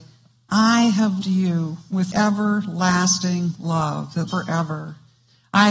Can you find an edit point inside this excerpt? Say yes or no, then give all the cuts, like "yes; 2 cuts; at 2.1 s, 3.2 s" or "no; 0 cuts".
yes; 3 cuts; at 1.2 s, 2.1 s, 4.3 s